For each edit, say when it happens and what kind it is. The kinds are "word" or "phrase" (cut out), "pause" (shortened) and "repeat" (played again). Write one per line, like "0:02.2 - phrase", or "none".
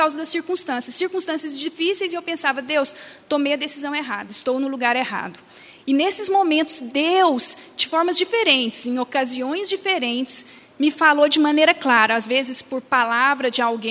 none